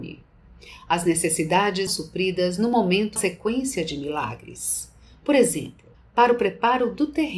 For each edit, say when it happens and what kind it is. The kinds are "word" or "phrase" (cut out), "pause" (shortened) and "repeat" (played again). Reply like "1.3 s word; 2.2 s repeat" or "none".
1.9 s word; 3.2 s phrase; 5.9 s pause